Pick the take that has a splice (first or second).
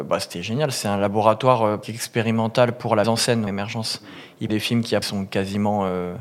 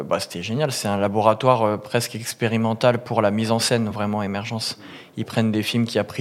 first